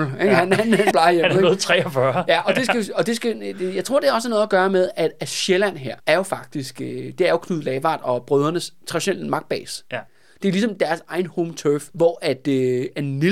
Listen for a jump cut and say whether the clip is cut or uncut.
cut